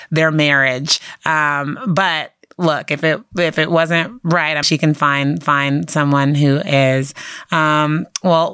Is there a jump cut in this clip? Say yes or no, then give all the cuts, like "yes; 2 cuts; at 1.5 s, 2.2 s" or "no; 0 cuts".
yes; 2 cuts; at 4.6 s, 5.4 s